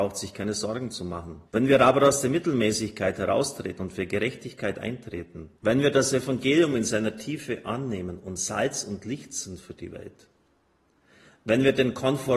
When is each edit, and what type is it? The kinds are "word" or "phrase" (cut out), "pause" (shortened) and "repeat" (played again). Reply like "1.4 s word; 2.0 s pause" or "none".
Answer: 1.5 s pause; 5.6 s pause